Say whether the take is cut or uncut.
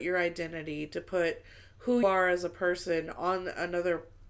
cut